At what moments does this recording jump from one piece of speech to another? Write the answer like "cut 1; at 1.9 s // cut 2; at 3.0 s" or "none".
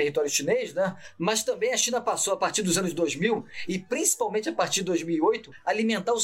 none